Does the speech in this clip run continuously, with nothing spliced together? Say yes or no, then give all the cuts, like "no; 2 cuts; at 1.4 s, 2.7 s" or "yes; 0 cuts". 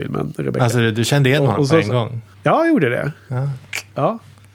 no; 1 cut; at 2.3 s